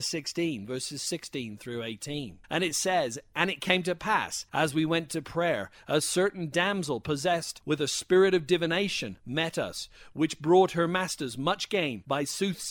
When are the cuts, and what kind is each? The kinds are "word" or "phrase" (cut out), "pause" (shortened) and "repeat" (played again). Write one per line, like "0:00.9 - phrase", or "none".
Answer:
0:02.4 - pause